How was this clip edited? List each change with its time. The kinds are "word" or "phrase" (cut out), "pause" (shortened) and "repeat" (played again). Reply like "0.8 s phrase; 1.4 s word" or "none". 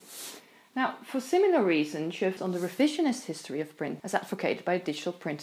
2.4 s word; 4.0 s word